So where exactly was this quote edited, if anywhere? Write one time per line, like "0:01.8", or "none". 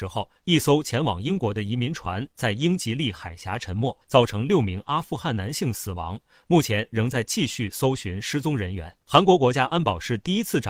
0:04.0
0:09.0